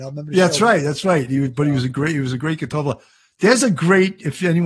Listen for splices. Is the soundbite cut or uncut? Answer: uncut